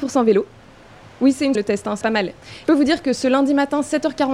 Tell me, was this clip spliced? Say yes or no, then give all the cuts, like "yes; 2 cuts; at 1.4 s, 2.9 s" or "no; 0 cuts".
yes; 3 cuts; at 1.5 s, 2.0 s, 2.6 s